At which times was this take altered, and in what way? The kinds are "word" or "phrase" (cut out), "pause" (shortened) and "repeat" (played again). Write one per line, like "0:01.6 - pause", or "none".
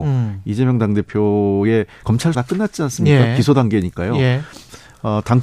0:02.0 - word
0:02.3 - word